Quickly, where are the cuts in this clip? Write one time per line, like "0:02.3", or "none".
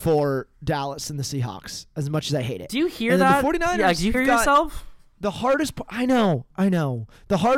0:04.1

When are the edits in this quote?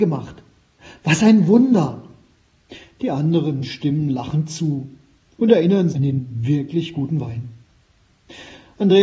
0:05.9

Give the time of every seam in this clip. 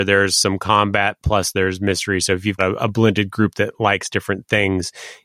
0:02.6

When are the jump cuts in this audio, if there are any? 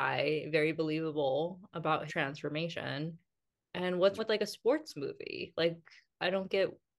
0:02.1
0:04.2

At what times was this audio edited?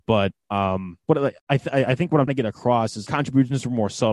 0:01.0
0:01.4
0:02.3
0:03.1

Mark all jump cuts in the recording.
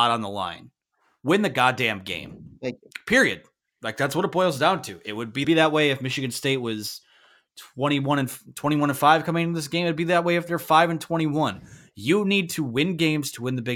0:05.4

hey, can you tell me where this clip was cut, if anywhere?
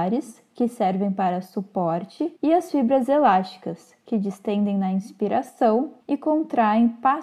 0:02.4
0:06.0

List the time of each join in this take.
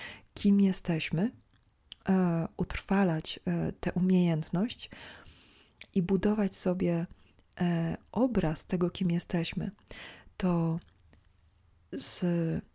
none

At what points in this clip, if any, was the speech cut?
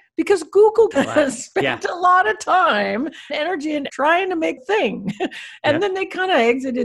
0:00.9
0:03.3
0:03.9
0:04.6

